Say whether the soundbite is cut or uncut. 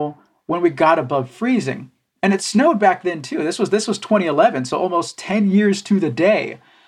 uncut